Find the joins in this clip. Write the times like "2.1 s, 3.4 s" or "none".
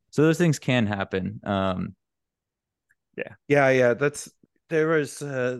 3.4 s, 4.4 s